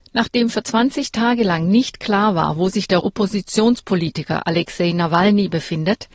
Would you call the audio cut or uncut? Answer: cut